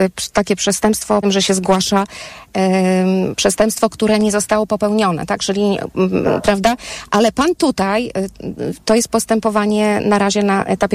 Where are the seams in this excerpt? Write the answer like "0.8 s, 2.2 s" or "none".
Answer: 1.2 s, 6.2 s